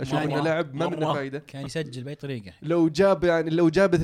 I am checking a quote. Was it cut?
yes; 1 cut; at 1.7 s

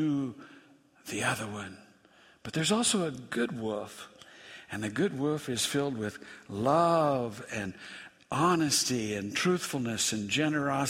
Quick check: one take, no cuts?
yes; 0 cuts

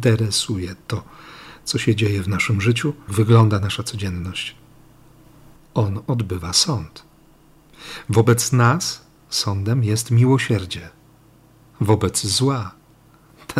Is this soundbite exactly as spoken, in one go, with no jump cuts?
no; 1 cut; at 3.1 s

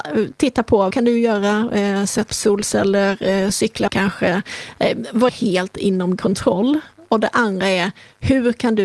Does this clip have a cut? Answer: yes; 5 cuts; at 0.9 s, 2.3 s, 3.9 s, 5.3 s, 6.2 s

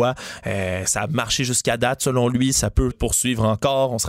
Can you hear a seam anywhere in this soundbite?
yes; 1 cut; at 2.9 s

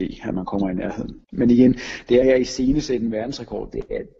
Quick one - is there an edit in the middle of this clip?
yes; 2 cuts; at 1.2 s, 2.2 s

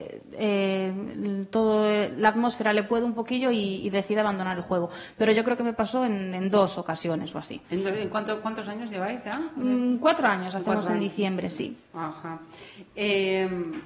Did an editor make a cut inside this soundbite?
yes; 1 cut; at 7.6 s

